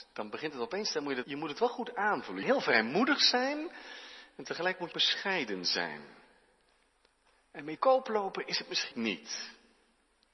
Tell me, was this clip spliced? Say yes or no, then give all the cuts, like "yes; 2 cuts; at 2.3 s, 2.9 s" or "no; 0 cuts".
yes; 5 cuts; at 1.2 s, 2.4 s, 4.9 s, 7.8 s, 8.9 s